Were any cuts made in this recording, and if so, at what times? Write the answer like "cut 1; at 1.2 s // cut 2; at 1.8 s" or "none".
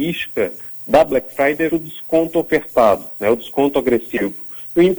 cut 1; at 1.7 s